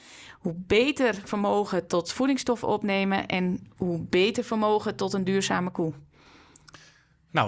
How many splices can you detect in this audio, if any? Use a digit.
0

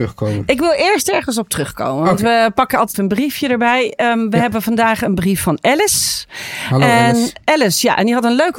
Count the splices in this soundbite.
1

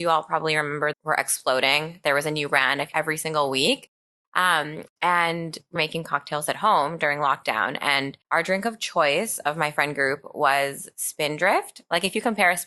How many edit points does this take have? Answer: 4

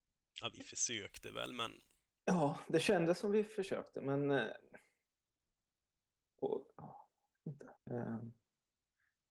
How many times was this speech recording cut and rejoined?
1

